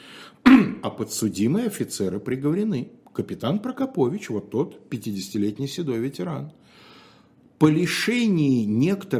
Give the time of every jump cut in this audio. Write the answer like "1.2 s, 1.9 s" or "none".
none